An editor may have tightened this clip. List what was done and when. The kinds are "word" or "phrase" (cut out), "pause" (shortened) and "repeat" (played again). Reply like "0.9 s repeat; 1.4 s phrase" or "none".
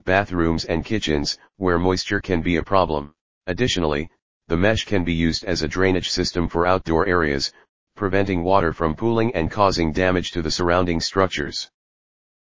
1.5 s pause; 3.3 s pause